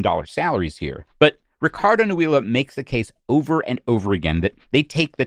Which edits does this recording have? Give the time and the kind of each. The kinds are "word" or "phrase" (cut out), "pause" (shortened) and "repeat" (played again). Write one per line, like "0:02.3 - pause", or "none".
0:01.1 - pause

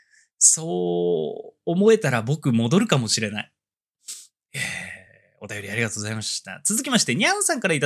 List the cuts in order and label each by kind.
none

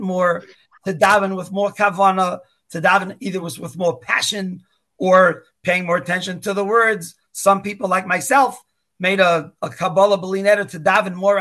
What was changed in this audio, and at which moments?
none

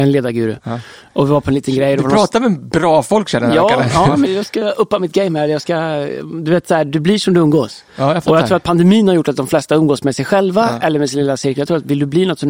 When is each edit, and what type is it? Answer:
0:04.2 - word
0:07.9 - pause

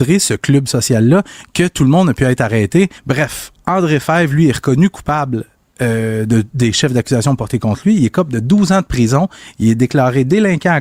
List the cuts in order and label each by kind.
0:03.0 - pause

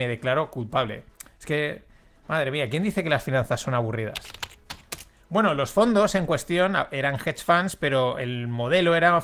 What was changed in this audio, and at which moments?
none

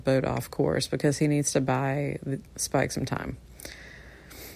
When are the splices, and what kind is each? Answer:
0:02.5 - pause

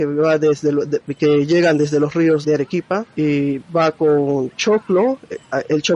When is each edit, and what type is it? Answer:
0:02.4 - word
0:03.1 - pause

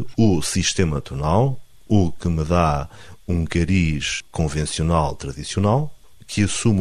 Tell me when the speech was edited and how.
none

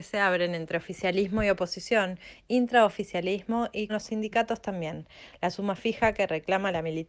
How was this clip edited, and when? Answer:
0:03.9 - word

